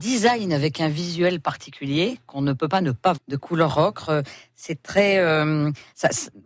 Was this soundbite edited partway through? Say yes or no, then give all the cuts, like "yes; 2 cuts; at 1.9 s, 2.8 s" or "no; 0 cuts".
yes; 1 cut; at 3.1 s